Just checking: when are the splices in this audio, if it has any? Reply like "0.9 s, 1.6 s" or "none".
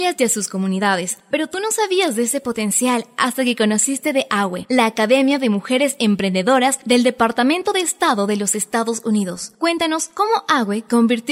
none